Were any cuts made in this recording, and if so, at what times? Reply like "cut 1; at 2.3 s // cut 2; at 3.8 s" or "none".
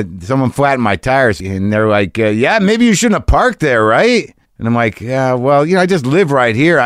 cut 1; at 4.4 s